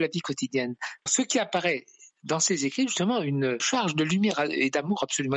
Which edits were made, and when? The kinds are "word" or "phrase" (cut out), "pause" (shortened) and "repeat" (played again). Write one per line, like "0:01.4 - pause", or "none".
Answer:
0:01.1 - word
0:03.6 - word